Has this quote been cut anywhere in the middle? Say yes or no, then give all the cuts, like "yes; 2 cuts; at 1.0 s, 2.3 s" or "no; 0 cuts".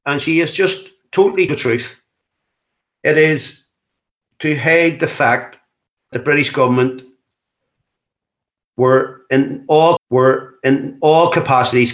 yes; 3 cuts; at 1.5 s, 6.1 s, 10.0 s